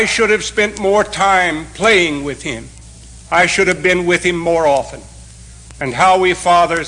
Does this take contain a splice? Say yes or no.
no